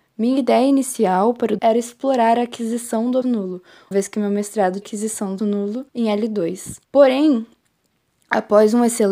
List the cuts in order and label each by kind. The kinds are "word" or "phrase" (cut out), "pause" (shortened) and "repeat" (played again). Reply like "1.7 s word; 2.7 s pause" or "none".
1.6 s word; 3.2 s word; 3.9 s word; 4.8 s phrase; 5.4 s word; 5.9 s pause; 6.8 s pause